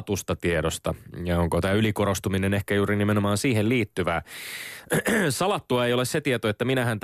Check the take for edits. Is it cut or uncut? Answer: uncut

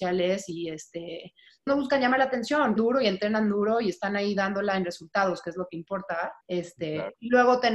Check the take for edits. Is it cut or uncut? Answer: cut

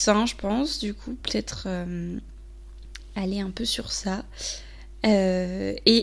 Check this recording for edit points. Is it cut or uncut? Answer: uncut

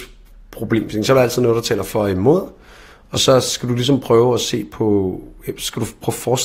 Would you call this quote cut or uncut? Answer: uncut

